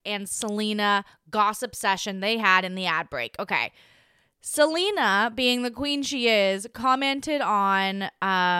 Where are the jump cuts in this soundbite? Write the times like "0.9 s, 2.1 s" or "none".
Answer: none